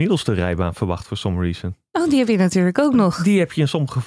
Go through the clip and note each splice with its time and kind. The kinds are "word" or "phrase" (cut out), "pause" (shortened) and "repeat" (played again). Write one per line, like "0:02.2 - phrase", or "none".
none